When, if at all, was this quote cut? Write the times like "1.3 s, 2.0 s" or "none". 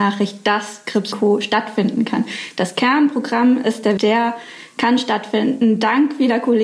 1.1 s, 4.0 s